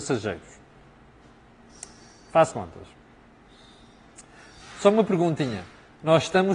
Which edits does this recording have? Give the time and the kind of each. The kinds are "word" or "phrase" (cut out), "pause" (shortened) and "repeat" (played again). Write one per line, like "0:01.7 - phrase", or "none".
0:02.5 - word